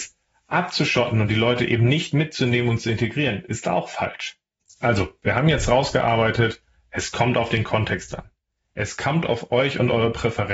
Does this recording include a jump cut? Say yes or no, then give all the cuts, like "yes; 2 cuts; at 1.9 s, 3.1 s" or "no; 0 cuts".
no; 0 cuts